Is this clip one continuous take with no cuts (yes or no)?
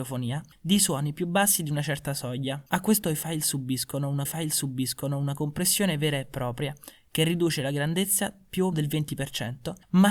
no